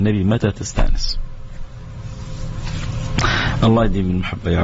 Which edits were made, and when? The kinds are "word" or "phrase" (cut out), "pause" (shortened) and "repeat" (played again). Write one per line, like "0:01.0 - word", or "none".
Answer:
none